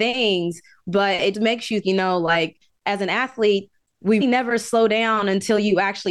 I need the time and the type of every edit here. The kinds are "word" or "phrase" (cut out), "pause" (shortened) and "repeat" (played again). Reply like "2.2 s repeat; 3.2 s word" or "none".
1.3 s word; 1.8 s word; 4.2 s word